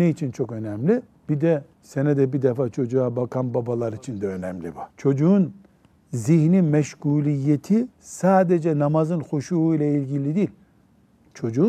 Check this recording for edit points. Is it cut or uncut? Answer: cut